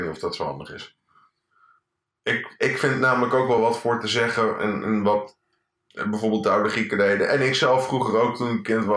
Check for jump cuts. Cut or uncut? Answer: uncut